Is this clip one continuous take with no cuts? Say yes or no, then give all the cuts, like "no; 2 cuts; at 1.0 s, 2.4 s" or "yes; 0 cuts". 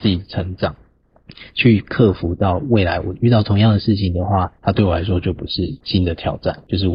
no; 1 cut; at 4.6 s